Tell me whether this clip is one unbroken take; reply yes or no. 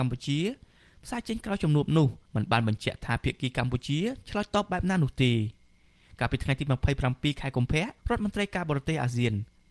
no